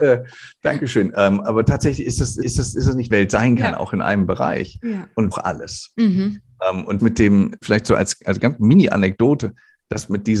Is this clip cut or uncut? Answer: cut